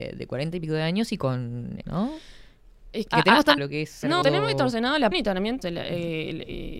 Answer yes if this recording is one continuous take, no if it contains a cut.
no